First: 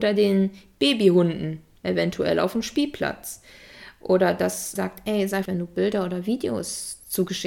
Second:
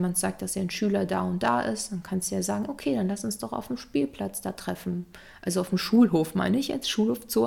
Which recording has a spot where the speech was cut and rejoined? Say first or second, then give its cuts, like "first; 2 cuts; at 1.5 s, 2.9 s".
first; 2 cuts; at 4.8 s, 5.5 s